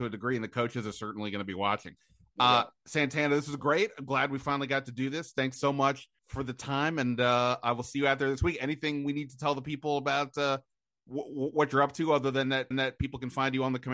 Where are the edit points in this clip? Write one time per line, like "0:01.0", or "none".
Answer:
0:02.8
0:06.2
0:12.7